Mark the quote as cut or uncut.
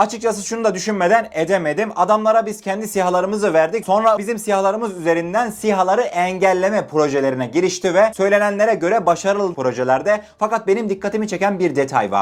cut